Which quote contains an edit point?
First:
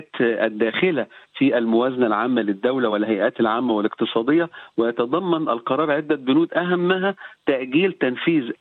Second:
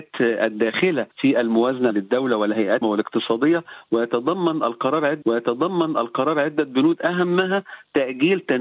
second; 4 cuts; at 1.1 s, 1.9 s, 2.8 s, 5.2 s

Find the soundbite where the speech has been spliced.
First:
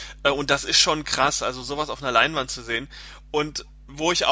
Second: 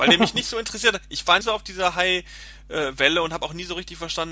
second; 1 cut; at 1.4 s

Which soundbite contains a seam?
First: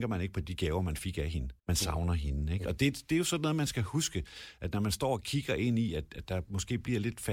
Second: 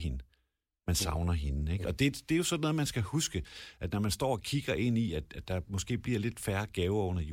first; 1 cut; at 1.6 s

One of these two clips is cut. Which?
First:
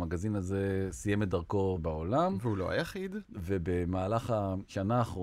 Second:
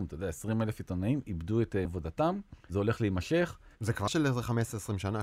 second; 3 cuts; at 1.9 s, 2.6 s, 4.1 s

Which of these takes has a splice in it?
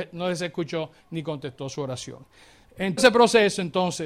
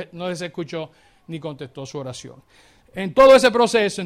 first; 2 cuts; at 1.0 s, 3.0 s

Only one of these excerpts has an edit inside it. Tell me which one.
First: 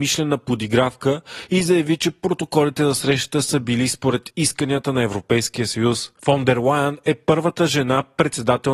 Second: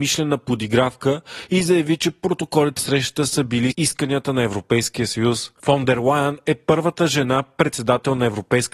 second; 2 cuts; at 2.8 s, 3.7 s

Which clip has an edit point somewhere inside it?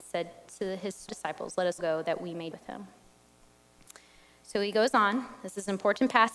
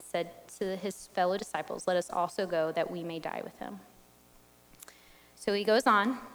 first; 3 cuts; at 1.1 s, 1.8 s, 2.5 s

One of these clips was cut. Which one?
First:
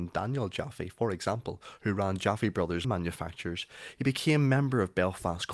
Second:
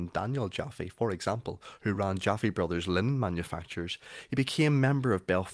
first; 1 cut; at 2.8 s

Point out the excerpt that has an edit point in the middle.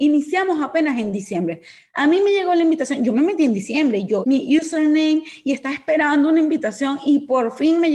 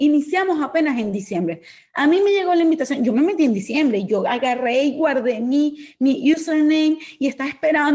first; 1 cut; at 4.2 s

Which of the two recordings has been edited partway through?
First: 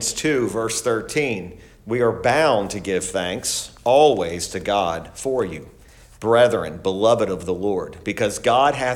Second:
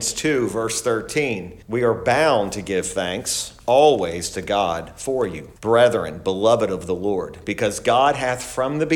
second; 2 cuts; at 1.6 s, 5.6 s

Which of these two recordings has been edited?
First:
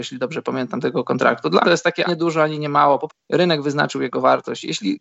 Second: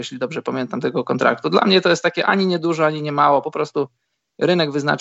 first; 3 cuts; at 1.6 s, 2.1 s, 3.1 s

